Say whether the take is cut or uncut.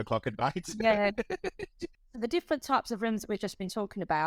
uncut